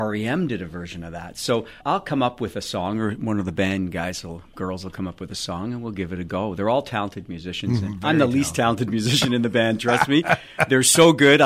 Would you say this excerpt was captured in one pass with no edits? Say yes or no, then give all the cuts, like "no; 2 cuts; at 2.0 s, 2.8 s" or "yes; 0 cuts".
no; 1 cut; at 1.8 s